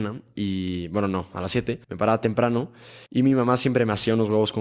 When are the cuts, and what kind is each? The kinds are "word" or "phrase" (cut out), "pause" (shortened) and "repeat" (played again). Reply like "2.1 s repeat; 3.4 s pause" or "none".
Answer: 1.8 s pause; 3.1 s pause